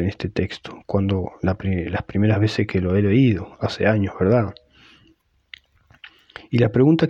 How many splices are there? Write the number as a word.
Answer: zero